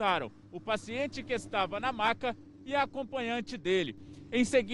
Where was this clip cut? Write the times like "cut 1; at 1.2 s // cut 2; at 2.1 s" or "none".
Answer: none